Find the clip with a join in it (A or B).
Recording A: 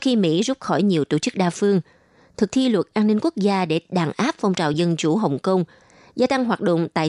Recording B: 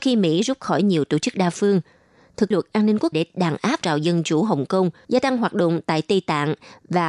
B